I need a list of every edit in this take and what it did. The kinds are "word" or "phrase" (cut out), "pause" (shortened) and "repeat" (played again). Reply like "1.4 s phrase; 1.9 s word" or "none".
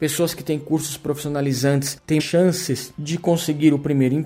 2.2 s word